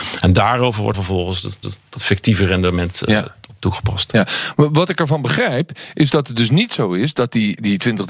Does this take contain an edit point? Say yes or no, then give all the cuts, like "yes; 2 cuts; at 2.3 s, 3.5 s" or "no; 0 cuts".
yes; 2 cuts; at 0.9 s, 1.6 s